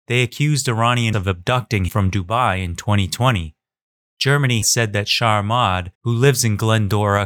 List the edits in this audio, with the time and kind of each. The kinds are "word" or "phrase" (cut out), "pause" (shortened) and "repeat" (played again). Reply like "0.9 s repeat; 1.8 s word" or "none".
1.1 s word; 1.9 s word; 4.6 s word; 5.9 s pause

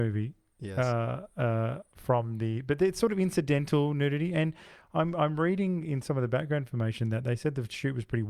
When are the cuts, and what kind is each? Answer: none

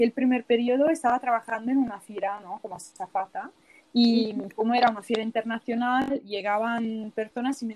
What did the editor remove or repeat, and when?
none

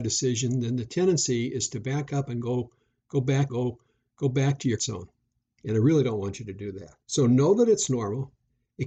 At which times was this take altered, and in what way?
3.5 s repeat; 4.8 s word; 7.0 s pause

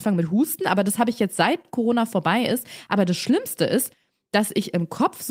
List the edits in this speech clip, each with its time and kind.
none

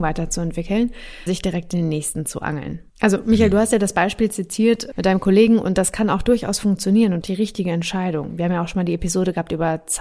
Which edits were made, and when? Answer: 1.3 s word; 2.9 s pause; 4.9 s word; 7.2 s phrase

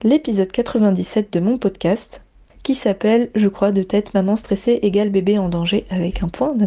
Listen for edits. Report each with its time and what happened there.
none

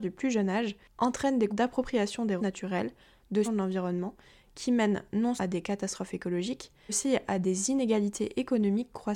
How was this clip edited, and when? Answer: 1.5 s word; 2.4 s word; 3.4 s word; 5.4 s word; 6.9 s word

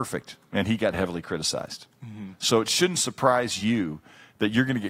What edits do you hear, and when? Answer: none

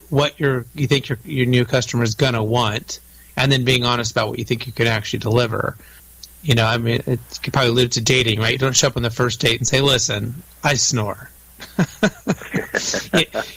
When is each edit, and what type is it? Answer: none

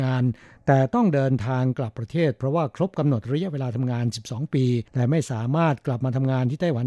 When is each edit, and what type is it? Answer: 4.9 s pause

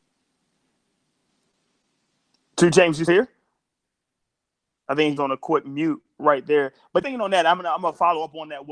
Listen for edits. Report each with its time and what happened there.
3.1 s word; 5.2 s phrase; 7.0 s word; 7.6 s word

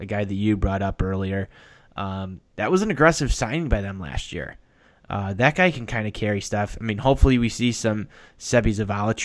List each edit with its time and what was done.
none

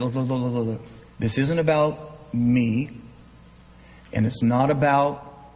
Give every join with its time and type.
1.1 s pause

